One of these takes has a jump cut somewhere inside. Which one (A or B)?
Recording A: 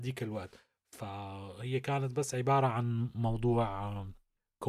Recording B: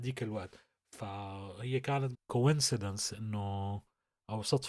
B